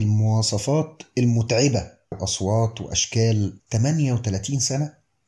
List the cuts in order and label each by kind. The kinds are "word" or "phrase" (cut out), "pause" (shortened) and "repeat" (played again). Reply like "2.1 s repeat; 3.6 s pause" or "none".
2.1 s word; 3.6 s word